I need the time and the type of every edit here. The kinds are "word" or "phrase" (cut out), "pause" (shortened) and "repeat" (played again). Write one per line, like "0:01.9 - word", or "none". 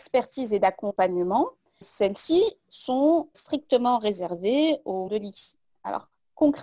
0:01.8 - word
0:03.3 - word
0:05.1 - word